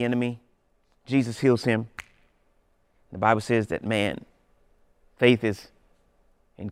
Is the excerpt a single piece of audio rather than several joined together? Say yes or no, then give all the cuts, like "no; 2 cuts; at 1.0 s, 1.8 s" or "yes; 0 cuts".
yes; 0 cuts